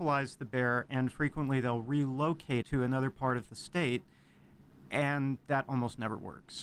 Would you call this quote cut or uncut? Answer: cut